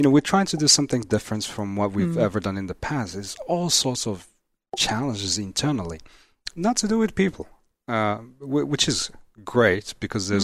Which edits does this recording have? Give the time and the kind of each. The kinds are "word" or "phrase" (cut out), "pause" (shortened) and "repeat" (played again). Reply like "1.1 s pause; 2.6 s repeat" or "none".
none